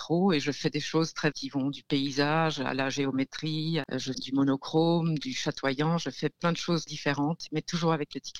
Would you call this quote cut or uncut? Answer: cut